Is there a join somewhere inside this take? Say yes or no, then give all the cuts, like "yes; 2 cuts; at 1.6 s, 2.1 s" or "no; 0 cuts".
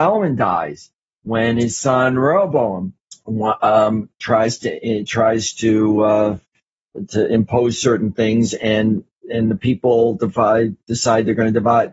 no; 0 cuts